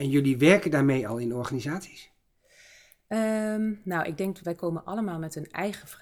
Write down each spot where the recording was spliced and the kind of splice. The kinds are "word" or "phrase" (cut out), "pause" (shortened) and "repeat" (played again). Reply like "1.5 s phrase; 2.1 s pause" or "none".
none